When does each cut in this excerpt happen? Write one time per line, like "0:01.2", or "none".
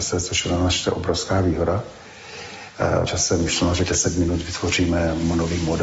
0:03.1
0:03.9